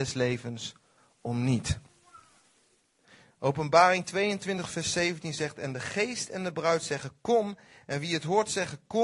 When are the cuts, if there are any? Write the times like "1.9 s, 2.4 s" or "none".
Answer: none